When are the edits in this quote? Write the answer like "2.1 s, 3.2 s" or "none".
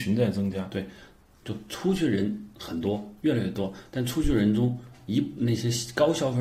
1.4 s